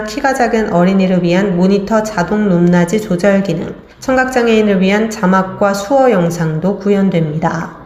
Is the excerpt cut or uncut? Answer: cut